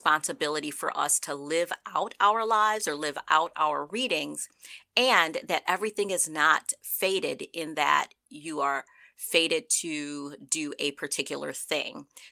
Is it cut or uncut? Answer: uncut